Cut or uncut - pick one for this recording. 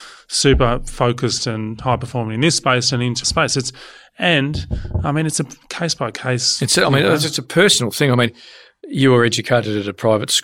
cut